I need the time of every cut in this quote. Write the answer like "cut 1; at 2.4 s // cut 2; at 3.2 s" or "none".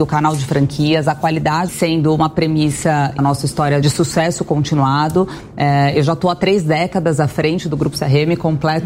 cut 1; at 1.7 s // cut 2; at 3.2 s // cut 3; at 3.8 s